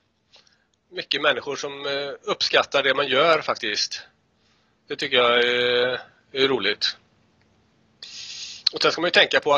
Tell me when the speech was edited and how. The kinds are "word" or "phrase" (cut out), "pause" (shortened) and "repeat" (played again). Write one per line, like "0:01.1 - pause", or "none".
none